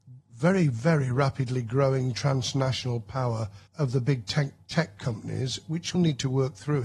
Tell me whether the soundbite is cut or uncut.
cut